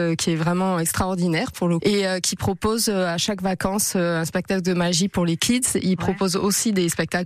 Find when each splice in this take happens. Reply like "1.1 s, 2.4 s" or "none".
1.8 s

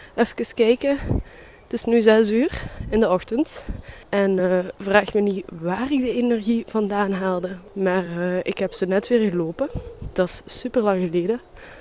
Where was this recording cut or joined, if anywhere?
none

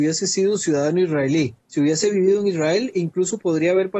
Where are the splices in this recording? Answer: 1.6 s

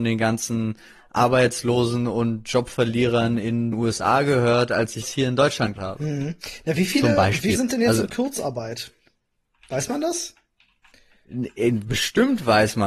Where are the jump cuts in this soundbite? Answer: 3.7 s, 5.0 s, 5.8 s, 7.6 s

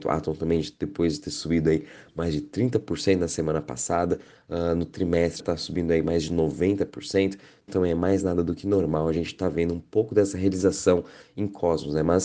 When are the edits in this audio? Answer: 5.4 s, 7.7 s

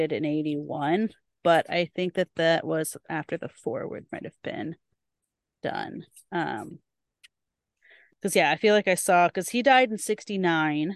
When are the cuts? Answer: none

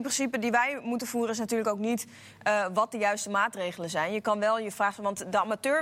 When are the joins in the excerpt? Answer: none

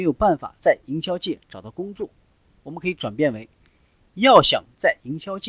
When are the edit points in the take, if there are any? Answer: none

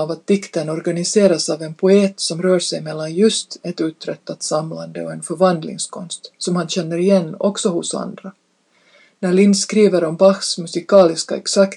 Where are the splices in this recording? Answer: none

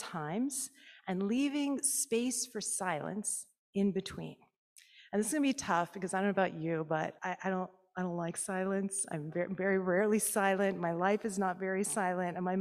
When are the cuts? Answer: 7.2 s

